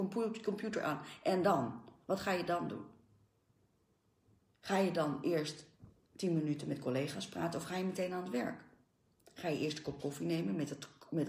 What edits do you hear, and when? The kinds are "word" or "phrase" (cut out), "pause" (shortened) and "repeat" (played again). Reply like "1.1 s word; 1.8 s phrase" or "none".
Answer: none